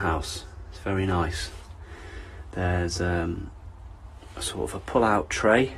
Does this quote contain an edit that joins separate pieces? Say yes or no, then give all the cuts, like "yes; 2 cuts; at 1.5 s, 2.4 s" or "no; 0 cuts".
no; 0 cuts